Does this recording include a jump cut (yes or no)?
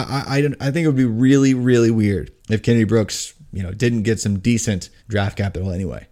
yes